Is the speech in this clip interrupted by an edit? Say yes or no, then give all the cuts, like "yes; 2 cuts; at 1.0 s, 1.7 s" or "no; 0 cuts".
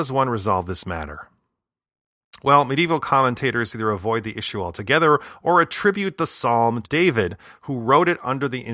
yes; 1 cut; at 6.8 s